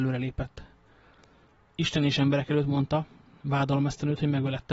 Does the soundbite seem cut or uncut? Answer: uncut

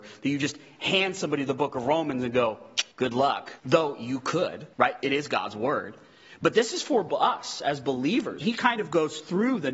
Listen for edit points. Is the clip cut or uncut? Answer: cut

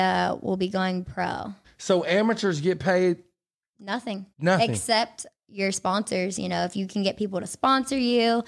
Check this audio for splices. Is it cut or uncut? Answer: cut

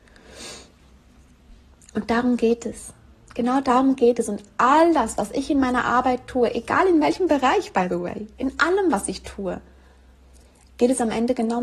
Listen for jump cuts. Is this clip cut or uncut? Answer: uncut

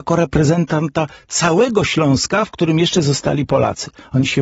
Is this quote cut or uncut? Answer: uncut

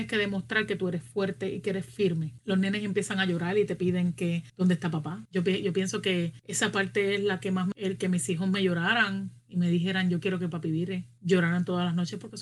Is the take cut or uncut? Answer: cut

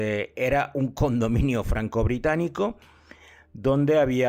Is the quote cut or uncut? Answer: uncut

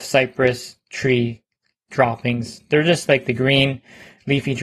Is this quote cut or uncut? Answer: uncut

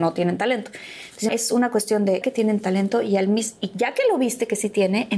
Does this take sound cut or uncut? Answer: cut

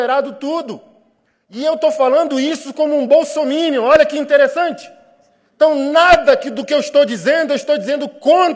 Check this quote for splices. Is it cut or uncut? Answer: uncut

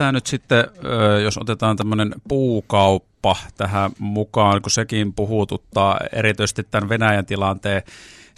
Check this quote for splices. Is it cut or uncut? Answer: uncut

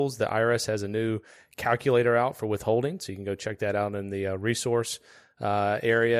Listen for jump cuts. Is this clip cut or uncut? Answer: uncut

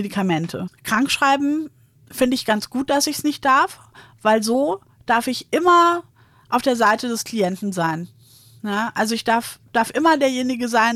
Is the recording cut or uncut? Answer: uncut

